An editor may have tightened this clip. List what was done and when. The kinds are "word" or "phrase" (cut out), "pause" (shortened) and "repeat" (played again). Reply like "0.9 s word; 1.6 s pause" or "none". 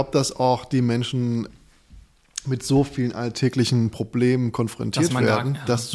1.5 s word